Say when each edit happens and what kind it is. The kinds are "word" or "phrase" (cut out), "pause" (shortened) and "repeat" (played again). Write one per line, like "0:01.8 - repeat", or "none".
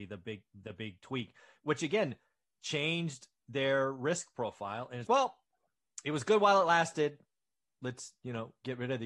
0:05.1 - word